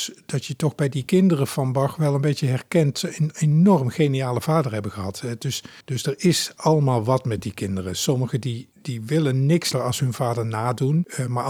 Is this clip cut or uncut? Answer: cut